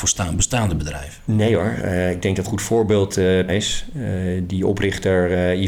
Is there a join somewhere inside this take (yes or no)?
yes